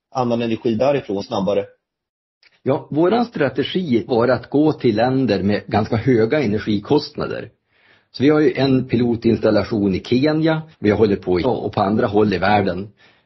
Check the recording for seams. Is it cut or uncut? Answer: cut